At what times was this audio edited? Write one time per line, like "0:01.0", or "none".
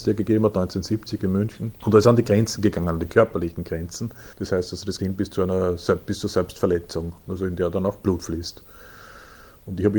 0:01.8
0:04.3
0:05.0